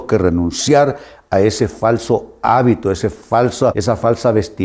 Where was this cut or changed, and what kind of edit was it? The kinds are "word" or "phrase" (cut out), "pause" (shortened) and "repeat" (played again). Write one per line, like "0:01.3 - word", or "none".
0:03.7 - word